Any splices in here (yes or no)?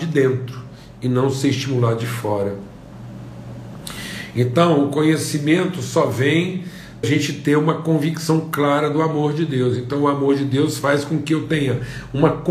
yes